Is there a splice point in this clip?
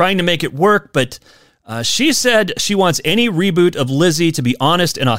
no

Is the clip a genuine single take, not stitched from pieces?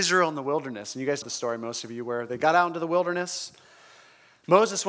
no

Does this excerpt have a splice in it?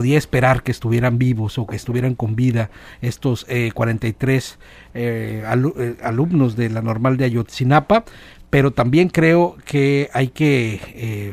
no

